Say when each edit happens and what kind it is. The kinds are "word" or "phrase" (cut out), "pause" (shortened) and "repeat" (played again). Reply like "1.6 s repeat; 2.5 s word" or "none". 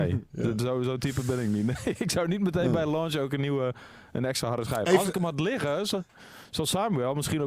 none